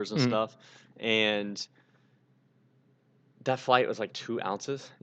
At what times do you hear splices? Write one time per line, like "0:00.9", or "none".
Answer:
none